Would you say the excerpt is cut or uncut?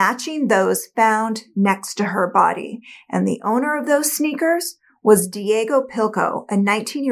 uncut